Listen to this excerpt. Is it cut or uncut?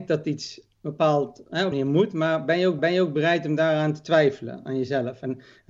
cut